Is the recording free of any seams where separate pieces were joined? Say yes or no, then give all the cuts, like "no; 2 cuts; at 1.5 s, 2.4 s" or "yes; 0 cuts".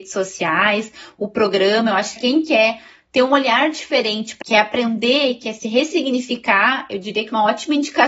no; 2 cuts; at 2.2 s, 4.4 s